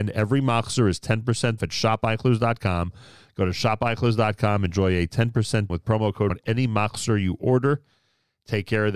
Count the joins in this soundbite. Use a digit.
3